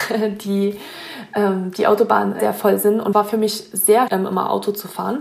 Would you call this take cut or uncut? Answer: cut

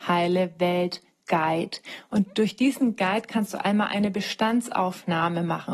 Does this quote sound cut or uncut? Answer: uncut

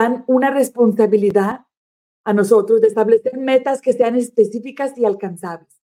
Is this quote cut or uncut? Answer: uncut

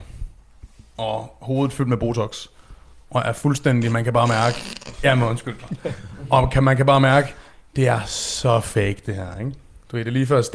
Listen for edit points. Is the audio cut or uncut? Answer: uncut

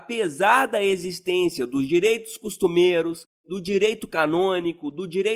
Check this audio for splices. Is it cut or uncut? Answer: uncut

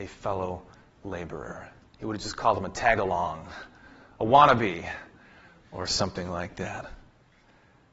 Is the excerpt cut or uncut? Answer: uncut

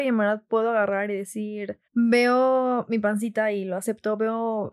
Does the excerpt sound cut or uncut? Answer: cut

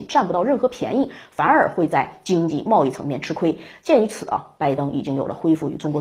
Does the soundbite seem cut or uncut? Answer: uncut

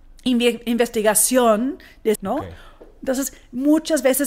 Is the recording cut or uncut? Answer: cut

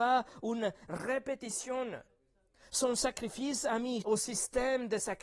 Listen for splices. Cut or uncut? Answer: cut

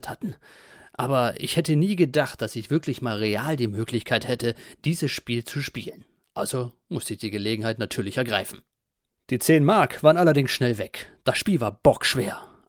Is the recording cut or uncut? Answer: uncut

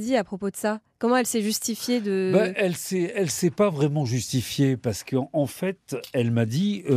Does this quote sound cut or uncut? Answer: uncut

